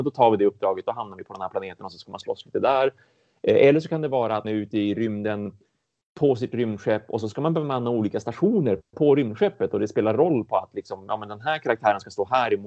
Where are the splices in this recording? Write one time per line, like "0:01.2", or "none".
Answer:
0:04.4